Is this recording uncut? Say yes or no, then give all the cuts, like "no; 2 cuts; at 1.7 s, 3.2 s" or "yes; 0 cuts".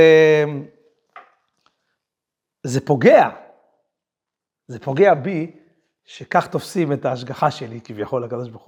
yes; 0 cuts